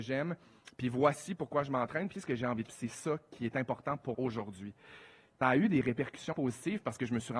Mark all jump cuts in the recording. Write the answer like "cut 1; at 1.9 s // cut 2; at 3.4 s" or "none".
cut 1; at 2.1 s // cut 2; at 2.7 s // cut 3; at 4.1 s // cut 4; at 5.4 s // cut 5; at 6.3 s